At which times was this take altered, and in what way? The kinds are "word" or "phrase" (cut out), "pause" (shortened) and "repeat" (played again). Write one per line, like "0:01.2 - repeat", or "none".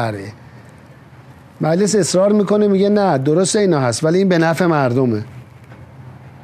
none